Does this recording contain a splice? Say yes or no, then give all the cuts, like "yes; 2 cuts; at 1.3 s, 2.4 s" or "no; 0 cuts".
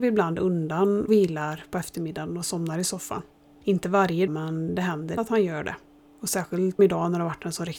yes; 4 cuts; at 1.1 s, 4.3 s, 5.2 s, 6.8 s